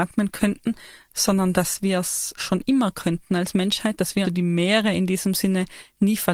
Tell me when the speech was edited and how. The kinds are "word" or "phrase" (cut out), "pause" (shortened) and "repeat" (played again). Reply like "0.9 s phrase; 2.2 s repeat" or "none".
2.4 s word; 4.2 s word